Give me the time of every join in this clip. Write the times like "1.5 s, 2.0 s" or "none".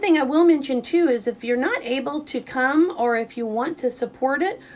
none